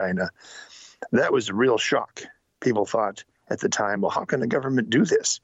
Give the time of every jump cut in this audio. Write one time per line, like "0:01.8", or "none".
none